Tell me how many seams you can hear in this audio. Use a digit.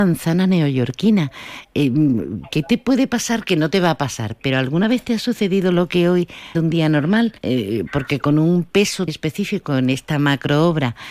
3